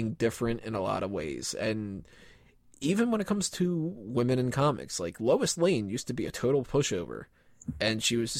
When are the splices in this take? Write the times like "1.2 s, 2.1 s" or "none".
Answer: none